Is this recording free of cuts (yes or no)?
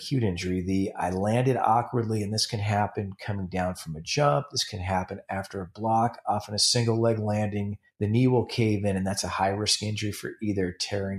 yes